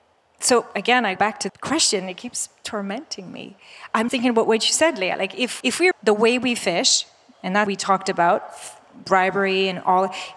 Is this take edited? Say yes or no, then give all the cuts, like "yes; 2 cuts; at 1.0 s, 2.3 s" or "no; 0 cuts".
yes; 6 cuts; at 1.2 s, 1.5 s, 4.1 s, 5.6 s, 5.9 s, 7.7 s